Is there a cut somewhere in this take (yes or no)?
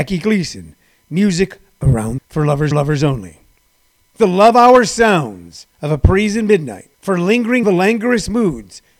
yes